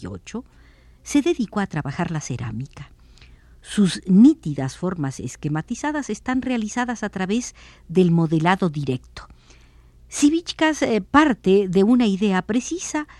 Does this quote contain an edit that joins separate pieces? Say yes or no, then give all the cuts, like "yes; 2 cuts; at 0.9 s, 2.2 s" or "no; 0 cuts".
no; 0 cuts